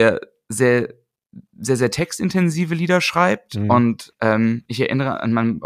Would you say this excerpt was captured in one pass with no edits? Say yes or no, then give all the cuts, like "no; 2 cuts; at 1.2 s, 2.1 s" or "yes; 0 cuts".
yes; 0 cuts